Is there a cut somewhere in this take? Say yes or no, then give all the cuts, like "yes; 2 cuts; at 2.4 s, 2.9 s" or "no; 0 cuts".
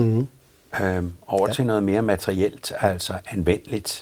no; 0 cuts